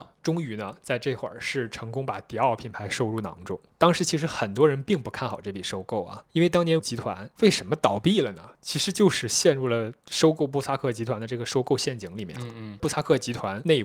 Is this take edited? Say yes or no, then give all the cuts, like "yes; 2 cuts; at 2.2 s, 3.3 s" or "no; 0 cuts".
yes; 1 cut; at 6.8 s